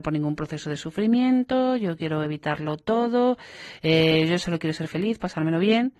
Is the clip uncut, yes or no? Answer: yes